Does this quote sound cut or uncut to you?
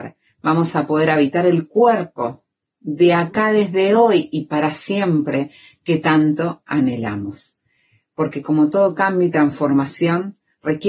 uncut